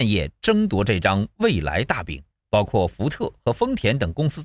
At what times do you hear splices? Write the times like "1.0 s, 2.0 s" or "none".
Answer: 2.3 s

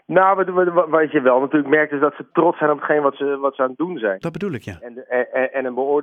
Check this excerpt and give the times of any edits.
none

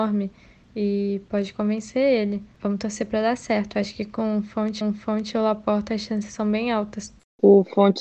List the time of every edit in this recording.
4.8 s

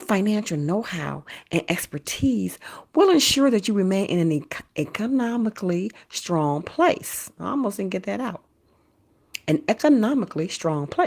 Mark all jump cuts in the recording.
none

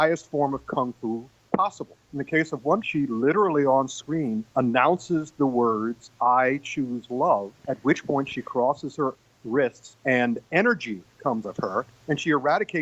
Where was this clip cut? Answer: 2.0 s, 2.8 s, 4.5 s, 7.6 s, 10.0 s, 11.4 s

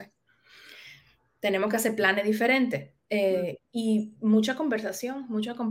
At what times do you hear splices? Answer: none

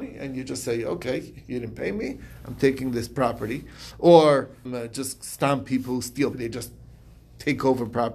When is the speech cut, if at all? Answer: 4.7 s, 6.3 s

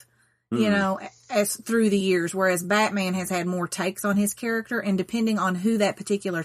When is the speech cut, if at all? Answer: none

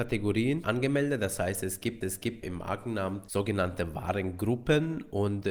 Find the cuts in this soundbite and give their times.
2.0 s

